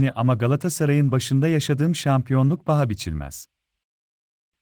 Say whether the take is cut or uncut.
uncut